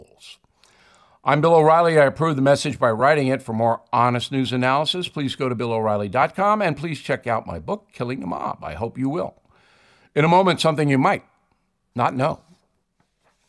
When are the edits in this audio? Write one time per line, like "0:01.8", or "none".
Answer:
none

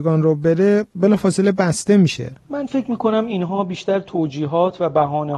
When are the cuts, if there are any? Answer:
none

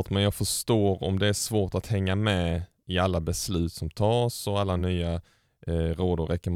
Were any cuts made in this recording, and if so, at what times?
none

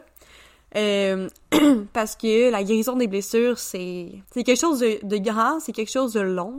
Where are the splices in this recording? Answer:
0:04.2

